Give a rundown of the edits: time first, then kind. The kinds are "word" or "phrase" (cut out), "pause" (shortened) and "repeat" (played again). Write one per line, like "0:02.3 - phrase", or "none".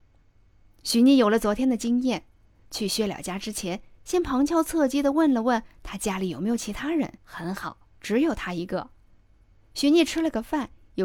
0:07.2 - pause
0:08.0 - pause